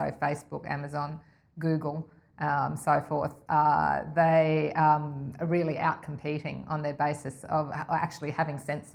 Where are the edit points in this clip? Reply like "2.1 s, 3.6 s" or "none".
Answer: none